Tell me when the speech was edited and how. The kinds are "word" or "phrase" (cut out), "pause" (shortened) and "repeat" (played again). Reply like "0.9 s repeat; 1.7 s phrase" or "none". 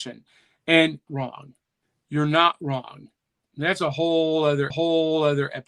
1.1 s phrase; 1.8 s pause; 3.4 s pause; 4.7 s repeat

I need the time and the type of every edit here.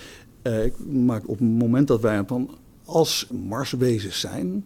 1.2 s word; 2.3 s phrase; 3.3 s word

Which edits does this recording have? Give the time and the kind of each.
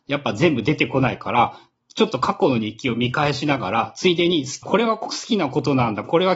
4.6 s word

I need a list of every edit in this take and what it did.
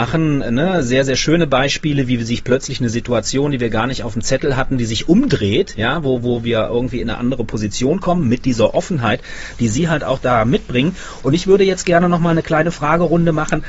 none

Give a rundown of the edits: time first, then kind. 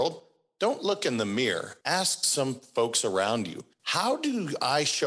1.8 s pause; 3.7 s pause

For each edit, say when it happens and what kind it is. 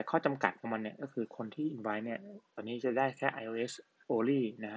none

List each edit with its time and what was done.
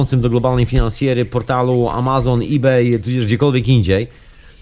none

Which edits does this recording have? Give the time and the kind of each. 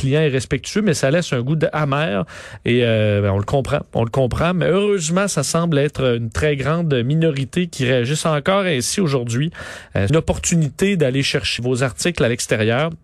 10.1 s phrase; 11.6 s word

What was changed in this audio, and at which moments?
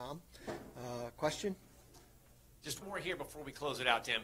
2.8 s word

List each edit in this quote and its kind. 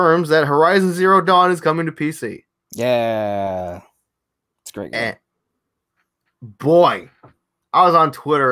none

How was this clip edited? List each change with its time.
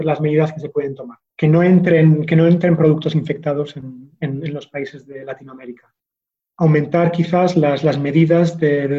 1.3 s pause

